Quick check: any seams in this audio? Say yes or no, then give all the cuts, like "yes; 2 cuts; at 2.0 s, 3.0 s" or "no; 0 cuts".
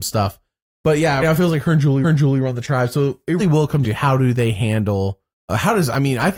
yes; 5 cuts; at 1.2 s, 2.0 s, 3.4 s, 3.8 s, 5.3 s